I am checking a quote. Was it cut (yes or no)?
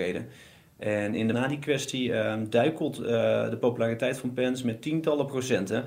yes